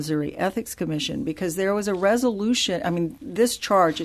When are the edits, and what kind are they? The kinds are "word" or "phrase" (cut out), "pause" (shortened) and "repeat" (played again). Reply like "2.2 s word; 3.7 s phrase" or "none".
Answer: none